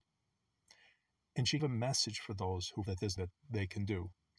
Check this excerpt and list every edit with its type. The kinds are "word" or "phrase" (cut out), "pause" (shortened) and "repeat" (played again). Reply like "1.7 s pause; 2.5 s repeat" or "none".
1.6 s word; 2.9 s word; 3.2 s word